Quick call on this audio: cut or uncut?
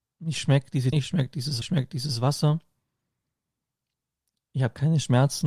cut